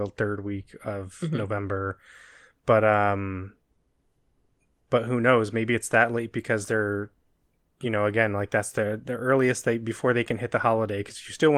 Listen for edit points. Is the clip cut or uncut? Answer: uncut